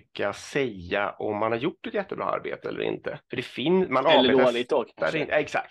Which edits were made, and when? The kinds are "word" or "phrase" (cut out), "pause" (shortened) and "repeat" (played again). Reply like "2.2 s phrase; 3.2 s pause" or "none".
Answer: 3.2 s pause

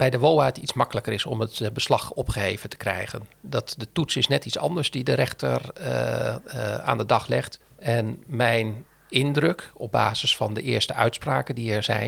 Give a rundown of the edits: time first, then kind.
7.6 s pause

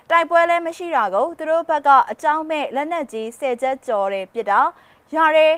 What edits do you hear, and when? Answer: none

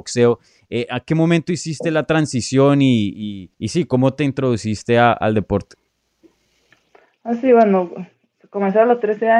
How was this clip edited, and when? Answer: 3.5 s pause

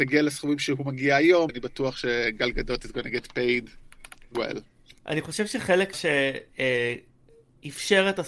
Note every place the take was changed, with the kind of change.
1.5 s word; 4.3 s word; 5.0 s pause; 5.9 s word

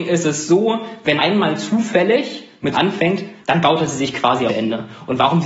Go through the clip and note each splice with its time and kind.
1.2 s word; 2.7 s phrase; 3.4 s pause; 4.5 s phrase

